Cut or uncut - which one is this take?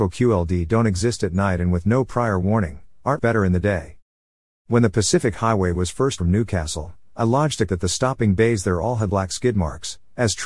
cut